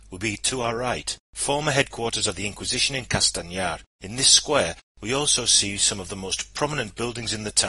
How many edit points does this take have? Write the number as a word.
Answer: two